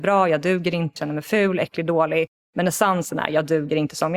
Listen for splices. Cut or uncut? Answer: cut